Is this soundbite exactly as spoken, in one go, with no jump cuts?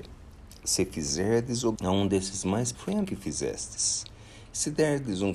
no; 3 cuts; at 1.8 s, 2.7 s, 3.0 s

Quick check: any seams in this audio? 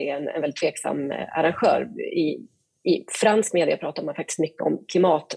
no; 0 cuts

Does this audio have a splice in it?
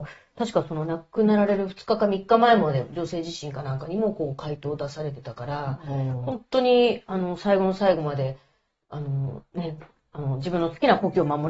no; 0 cuts

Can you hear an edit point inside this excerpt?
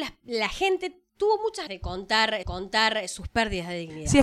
yes; 3 cuts; at 1.1 s, 1.7 s, 2.4 s

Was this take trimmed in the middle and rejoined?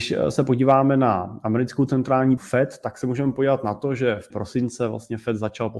yes; 2 cuts; at 2.4 s, 4.3 s

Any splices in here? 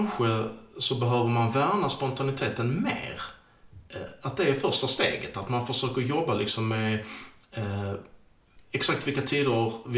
no; 0 cuts

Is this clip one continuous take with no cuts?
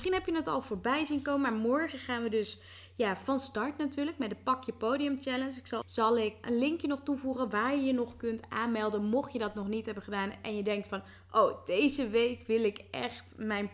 no; 2 cuts; at 5.8 s, 6.4 s

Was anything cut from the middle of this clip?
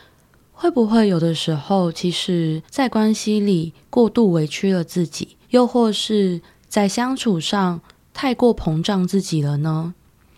yes; 3 cuts; at 2.6 s, 5.4 s, 8.0 s

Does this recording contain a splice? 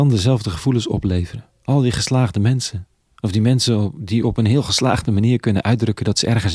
no; 0 cuts

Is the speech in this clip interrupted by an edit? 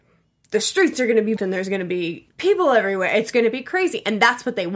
yes; 2 cuts; at 1.4 s, 2.3 s

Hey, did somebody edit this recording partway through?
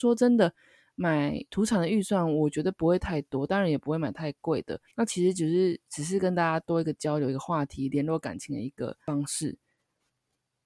yes; 1 cut; at 4.9 s

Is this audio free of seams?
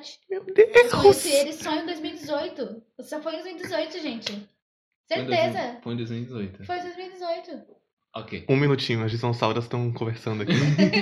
yes; 0 cuts

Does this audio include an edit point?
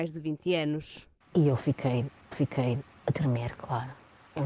yes; 2 cuts; at 1.2 s, 2.3 s

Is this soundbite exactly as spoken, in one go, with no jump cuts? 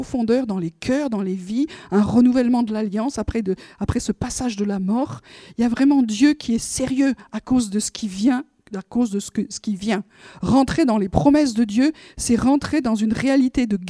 yes; 0 cuts

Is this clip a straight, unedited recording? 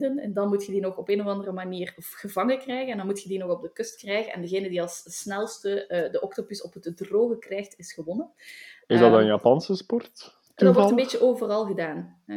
yes; 0 cuts

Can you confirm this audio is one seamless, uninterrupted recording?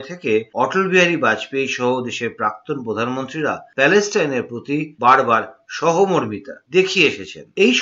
yes; 0 cuts

